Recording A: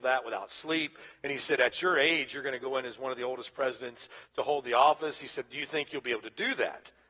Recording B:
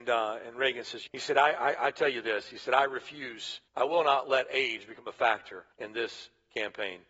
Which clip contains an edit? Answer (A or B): B